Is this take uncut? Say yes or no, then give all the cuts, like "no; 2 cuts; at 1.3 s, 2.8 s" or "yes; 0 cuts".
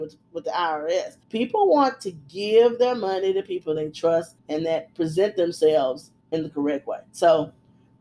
no; 4 cuts; at 1.2 s, 4.4 s, 6.2 s, 7.1 s